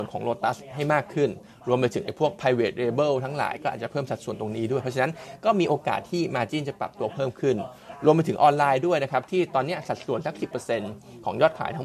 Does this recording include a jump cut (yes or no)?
no